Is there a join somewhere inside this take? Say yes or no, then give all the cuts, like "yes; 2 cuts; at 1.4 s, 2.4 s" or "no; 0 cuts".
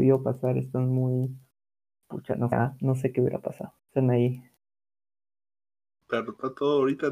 yes; 2 cuts; at 2.5 s, 3.8 s